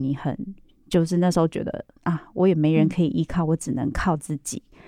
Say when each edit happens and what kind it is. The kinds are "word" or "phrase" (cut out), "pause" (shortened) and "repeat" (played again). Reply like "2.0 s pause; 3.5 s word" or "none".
none